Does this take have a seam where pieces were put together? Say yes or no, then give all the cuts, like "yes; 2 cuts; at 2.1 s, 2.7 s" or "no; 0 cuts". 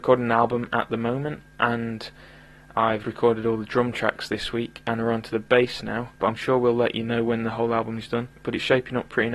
yes; 2 cuts; at 3.0 s, 6.1 s